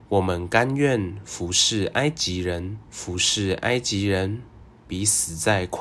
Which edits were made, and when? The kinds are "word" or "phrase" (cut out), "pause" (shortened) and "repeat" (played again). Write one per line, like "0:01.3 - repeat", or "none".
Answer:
0:02.9 - pause